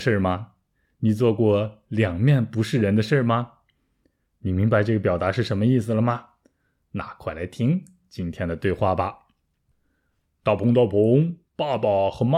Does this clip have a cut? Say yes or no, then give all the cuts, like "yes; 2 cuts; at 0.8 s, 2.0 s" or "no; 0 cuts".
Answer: yes; 1 cut; at 11.5 s